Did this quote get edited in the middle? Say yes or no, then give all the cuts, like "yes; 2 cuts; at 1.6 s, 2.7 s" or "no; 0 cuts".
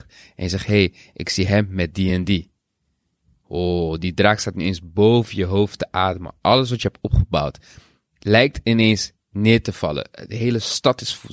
no; 0 cuts